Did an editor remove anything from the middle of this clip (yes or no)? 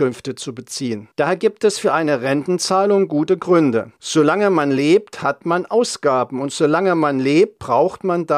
yes